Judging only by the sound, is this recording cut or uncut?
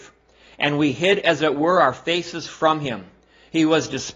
uncut